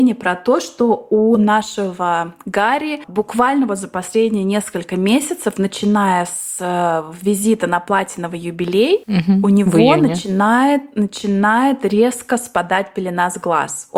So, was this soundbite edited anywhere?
no; 0 cuts

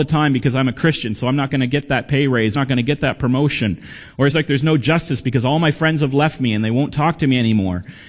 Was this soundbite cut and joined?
yes; 2 cuts; at 2.5 s, 4.3 s

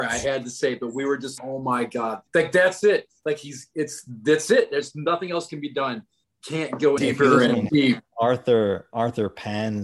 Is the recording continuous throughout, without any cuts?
no; 5 cuts; at 1.4 s, 2.3 s, 6.2 s, 7.0 s, 7.7 s

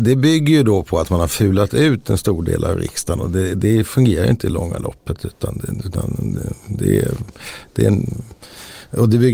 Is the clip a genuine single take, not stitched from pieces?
yes; 0 cuts

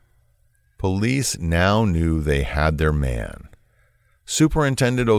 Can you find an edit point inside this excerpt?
no; 0 cuts

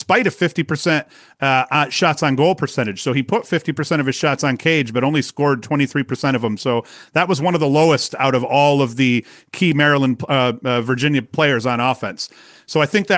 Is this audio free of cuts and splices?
yes; 0 cuts

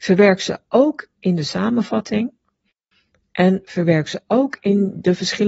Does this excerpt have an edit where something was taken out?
no; 0 cuts

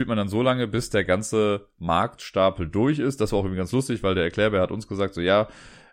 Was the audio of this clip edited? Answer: no; 0 cuts

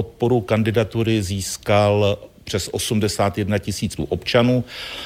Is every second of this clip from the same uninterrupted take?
no; 1 cut; at 4.0 s

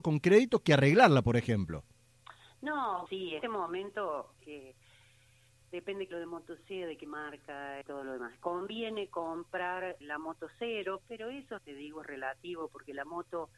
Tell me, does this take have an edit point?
yes; 8 cuts; at 3.1 s, 3.4 s, 4.4 s, 6.1 s, 7.8 s, 10.0 s, 11.0 s, 11.6 s

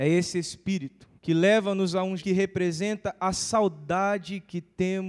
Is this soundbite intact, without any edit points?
no; 2 cuts; at 1.2 s, 2.2 s

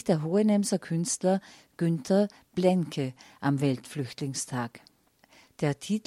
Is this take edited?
no; 0 cuts

